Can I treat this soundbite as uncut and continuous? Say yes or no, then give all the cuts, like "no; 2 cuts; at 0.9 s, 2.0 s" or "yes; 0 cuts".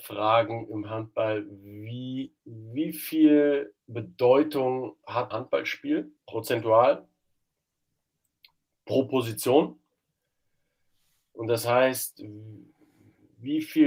no; 4 cuts; at 2.4 s, 3.8 s, 5.3 s, 6.2 s